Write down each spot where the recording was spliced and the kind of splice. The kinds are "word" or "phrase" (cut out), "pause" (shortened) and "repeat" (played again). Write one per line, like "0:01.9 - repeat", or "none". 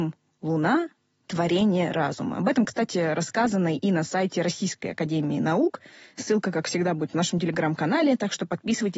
none